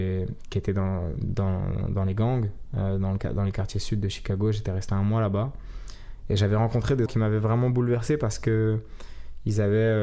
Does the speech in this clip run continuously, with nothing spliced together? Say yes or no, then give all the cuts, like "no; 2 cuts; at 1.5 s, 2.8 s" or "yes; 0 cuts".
no; 1 cut; at 7.1 s